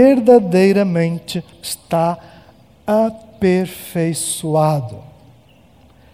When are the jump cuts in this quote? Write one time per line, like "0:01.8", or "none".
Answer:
0:01.5